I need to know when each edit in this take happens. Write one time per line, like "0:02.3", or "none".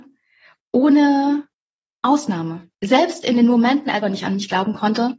0:04.0